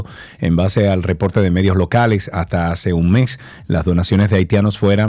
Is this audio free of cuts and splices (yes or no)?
yes